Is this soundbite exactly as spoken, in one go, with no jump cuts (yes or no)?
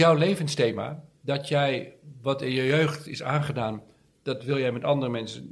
yes